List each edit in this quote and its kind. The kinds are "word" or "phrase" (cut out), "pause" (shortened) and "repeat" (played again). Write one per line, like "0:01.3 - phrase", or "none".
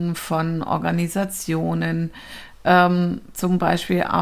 none